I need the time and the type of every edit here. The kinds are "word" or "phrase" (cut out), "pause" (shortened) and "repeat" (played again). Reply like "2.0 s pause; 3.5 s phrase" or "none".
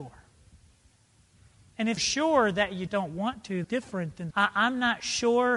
2.0 s word; 2.9 s word; 3.6 s word; 4.3 s word